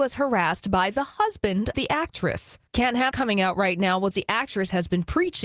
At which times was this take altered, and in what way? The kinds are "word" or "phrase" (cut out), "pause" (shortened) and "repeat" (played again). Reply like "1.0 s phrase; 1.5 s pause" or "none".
1.7 s word; 2.7 s pause; 3.1 s word; 4.1 s phrase